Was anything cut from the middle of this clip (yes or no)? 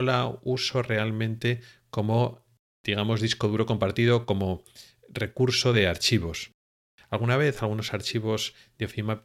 no